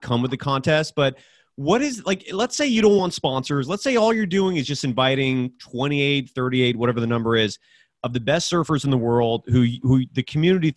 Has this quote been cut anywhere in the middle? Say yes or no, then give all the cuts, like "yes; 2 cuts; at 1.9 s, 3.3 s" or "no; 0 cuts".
no; 0 cuts